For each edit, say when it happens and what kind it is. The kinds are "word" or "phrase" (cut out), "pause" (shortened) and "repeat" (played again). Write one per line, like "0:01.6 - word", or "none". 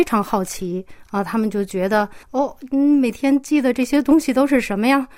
0:02.2 - pause